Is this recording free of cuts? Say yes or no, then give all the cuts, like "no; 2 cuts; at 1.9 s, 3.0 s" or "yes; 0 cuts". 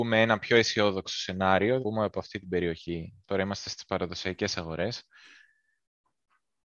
no; 1 cut; at 1.8 s